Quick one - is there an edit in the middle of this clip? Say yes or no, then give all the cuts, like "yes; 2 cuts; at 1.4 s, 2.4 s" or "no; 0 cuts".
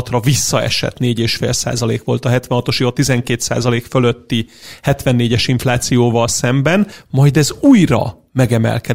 yes; 1 cut; at 2.8 s